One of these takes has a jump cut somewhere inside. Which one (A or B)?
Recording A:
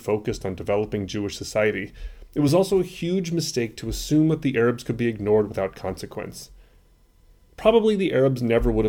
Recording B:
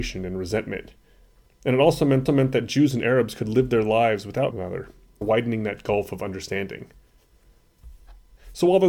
B